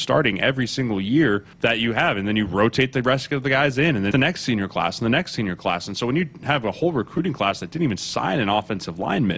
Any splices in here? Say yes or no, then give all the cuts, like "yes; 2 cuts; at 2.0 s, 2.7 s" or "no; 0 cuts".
yes; 2 cuts; at 1.5 s, 4.1 s